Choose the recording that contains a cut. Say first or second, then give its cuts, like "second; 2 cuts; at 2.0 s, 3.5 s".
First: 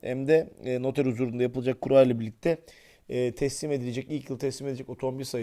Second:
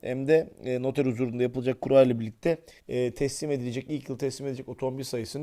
second; 1 cut; at 2.8 s